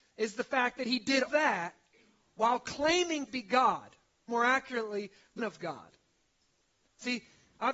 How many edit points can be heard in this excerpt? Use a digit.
4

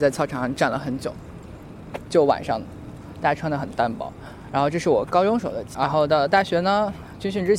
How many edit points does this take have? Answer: 1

